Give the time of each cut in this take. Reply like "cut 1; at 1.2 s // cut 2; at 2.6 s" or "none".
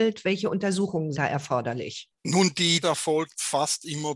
cut 1; at 1.1 s // cut 2; at 2.2 s // cut 3; at 2.8 s